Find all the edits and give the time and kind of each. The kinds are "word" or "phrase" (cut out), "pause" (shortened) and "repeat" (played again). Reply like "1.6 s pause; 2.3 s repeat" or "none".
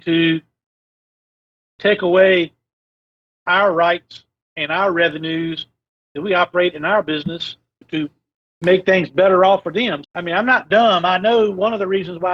7.8 s word; 10.0 s word